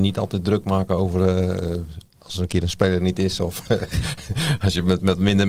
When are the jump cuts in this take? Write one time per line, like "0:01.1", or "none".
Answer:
0:02.1

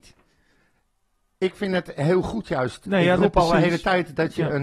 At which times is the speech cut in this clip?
none

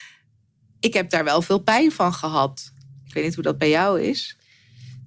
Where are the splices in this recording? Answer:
none

